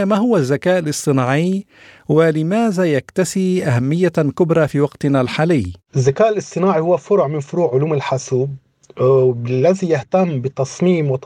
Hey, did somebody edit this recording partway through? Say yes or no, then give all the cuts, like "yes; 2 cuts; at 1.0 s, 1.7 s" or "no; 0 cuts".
no; 0 cuts